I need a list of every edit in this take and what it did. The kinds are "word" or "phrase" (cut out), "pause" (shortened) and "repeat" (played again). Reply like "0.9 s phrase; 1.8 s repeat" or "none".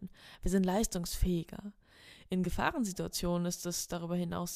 none